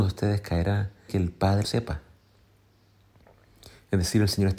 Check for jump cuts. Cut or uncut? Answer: cut